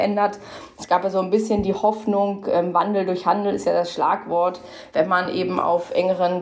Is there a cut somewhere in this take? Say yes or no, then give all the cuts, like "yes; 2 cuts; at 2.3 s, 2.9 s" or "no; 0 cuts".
no; 0 cuts